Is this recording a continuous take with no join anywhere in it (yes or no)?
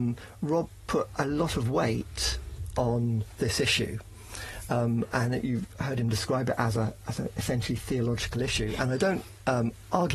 yes